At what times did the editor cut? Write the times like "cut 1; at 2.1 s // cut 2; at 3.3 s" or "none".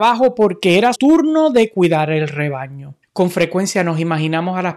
cut 1; at 0.9 s // cut 2; at 3.0 s